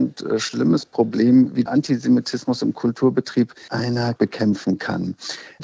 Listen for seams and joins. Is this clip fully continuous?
no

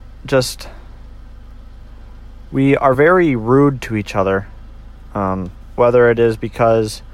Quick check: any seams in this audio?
no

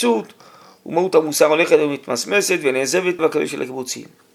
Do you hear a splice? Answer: yes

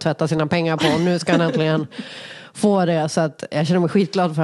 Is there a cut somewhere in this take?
no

